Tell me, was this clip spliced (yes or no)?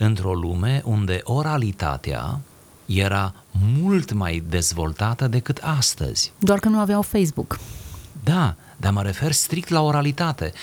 no